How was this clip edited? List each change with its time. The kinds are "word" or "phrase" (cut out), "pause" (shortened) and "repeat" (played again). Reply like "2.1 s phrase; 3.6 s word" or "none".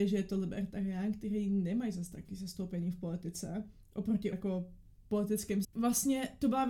2.3 s word; 4.3 s word; 5.6 s word